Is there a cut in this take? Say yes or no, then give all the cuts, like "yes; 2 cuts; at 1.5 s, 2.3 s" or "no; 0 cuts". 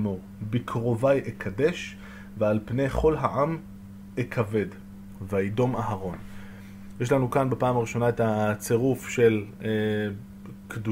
no; 0 cuts